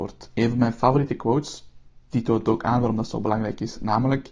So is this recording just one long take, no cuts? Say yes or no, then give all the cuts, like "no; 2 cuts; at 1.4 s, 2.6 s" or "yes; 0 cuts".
yes; 0 cuts